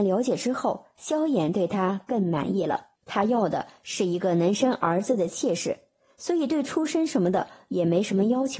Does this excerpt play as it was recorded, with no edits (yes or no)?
no